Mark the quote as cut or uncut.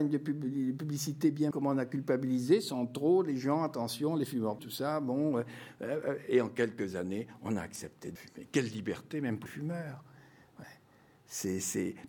cut